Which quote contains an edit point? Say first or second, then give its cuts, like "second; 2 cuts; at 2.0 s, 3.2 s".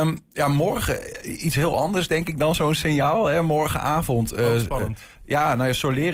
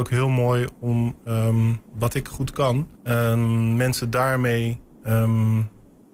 second; 2 cuts; at 1.8 s, 2.9 s